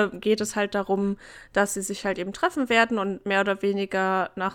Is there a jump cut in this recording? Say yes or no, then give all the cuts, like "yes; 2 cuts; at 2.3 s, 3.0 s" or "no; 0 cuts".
no; 0 cuts